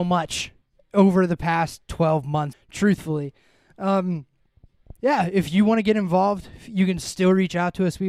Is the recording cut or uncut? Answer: cut